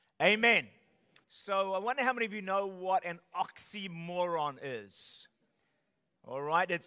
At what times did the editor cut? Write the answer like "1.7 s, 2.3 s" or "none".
1.2 s

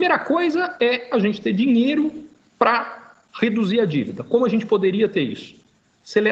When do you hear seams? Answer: none

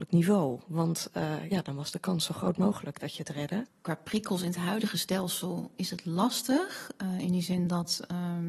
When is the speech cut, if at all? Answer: none

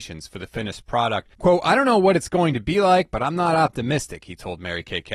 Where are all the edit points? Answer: 1.3 s

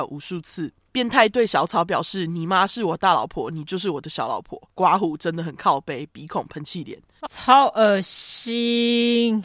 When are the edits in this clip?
7.3 s

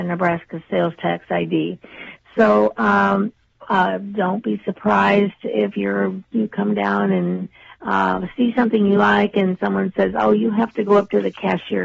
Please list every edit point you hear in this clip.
none

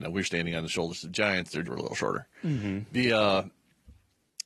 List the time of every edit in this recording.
1.6 s

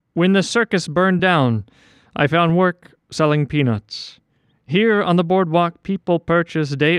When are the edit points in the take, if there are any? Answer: none

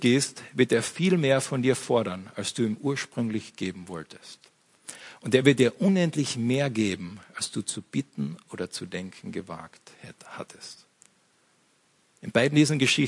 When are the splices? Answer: none

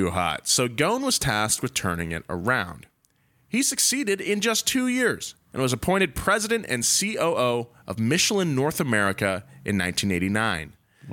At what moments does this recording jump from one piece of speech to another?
none

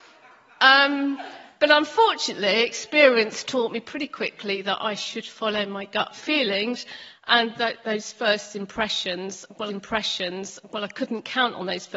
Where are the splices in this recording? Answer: 9.7 s

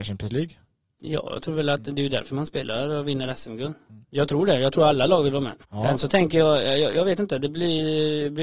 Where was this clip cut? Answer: 4.0 s, 5.6 s

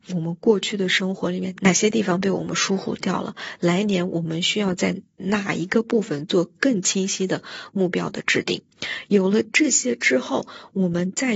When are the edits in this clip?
5.1 s

